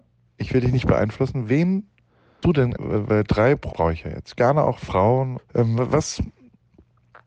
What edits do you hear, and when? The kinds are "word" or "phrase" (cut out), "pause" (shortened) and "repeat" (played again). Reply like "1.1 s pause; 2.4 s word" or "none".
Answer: 2.4 s word; 2.8 s word; 3.7 s word; 5.4 s word